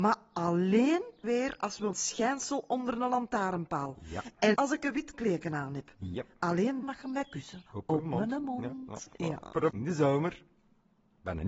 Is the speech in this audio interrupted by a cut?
yes; 7 cuts; at 1.2 s, 1.9 s, 4.5 s, 5.1 s, 6.8 s, 7.7 s, 9.7 s

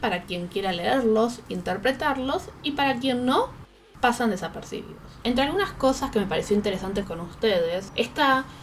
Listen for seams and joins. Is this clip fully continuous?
no; 1 cut; at 7.0 s

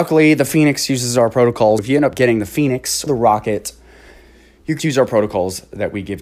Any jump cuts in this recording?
yes; 3 cuts; at 1.8 s, 3.1 s, 4.8 s

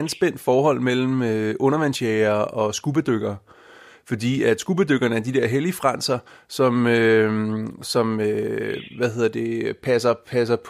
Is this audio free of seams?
yes; 0 cuts

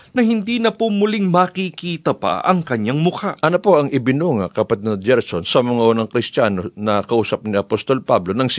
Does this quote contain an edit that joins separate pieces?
no; 0 cuts

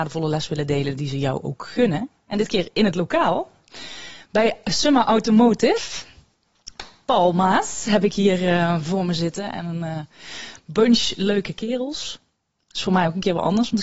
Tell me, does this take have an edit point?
yes; 1 cut; at 2.1 s

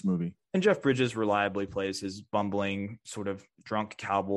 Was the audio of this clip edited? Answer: no; 0 cuts

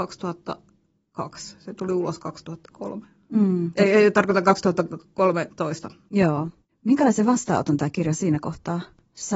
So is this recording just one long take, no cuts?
yes; 0 cuts

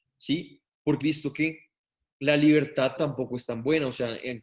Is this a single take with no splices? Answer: no; 2 cuts; at 1.0 s, 3.0 s

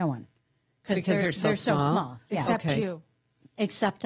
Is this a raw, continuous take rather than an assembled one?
yes; 0 cuts

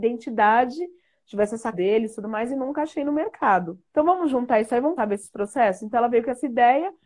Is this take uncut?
no; 3 cuts; at 1.7 s, 3.9 s, 5.0 s

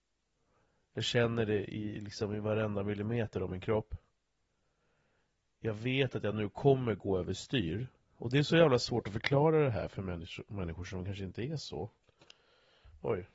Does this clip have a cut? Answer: no; 0 cuts

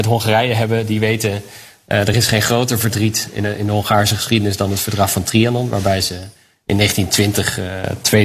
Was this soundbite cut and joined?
no; 0 cuts

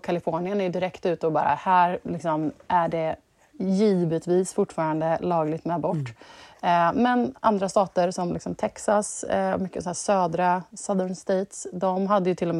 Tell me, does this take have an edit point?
no; 0 cuts

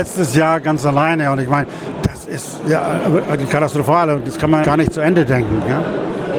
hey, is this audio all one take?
no; 1 cut; at 4.6 s

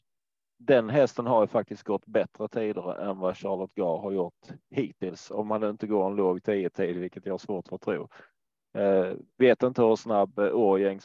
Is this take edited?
yes; 1 cut; at 9.3 s

